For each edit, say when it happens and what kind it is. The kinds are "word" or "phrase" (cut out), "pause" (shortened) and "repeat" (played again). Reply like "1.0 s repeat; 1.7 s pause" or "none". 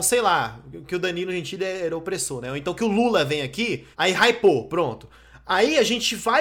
3.9 s pause

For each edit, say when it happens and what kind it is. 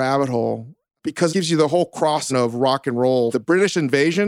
1.3 s word; 2.3 s word; 3.3 s word

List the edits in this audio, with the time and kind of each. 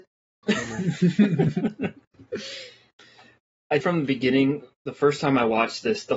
3.8 s word

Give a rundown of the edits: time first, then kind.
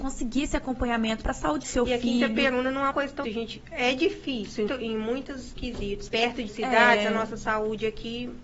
1.2 s word; 1.6 s word; 2.9 s word; 3.2 s word; 4.7 s word; 6.1 s word; 6.5 s word

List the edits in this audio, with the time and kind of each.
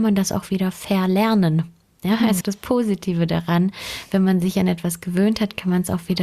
2.4 s phrase

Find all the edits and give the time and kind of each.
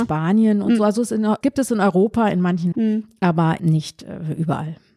1.4 s word; 2.7 s word; 3.6 s word

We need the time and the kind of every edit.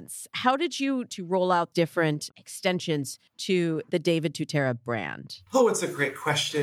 1.1 s word; 1.7 s word; 3.3 s pause; 5.5 s pause

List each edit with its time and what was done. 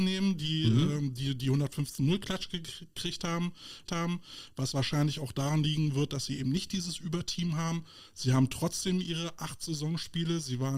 3.9 s repeat

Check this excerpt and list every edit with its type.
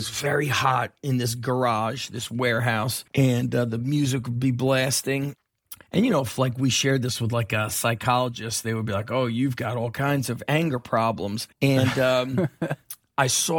3.1 s pause; 5.8 s pause; 11.5 s pause

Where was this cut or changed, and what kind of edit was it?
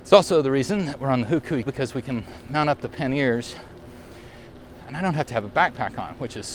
1.7 s word

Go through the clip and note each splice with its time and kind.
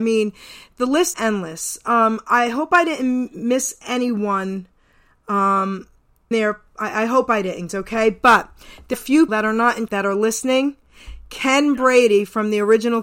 1.1 s word; 6.3 s word; 7.7 s word; 8.9 s word; 9.3 s word; 9.9 s word

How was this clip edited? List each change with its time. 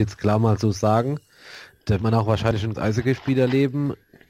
2.0 s word; 2.7 s word

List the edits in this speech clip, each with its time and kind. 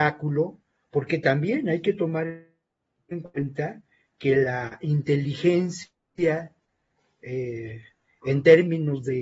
none

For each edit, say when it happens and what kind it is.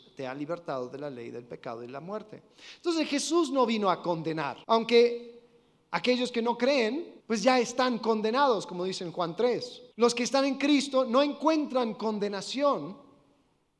4.6 s pause; 7.2 s pause; 9.9 s pause

